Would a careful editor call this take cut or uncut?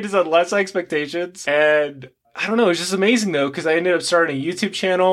uncut